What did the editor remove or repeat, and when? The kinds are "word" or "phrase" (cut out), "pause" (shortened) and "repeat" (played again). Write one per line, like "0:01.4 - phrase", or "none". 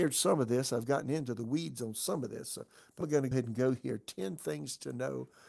0:03.0 - word
0:03.3 - word